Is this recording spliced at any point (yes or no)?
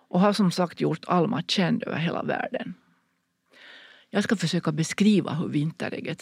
no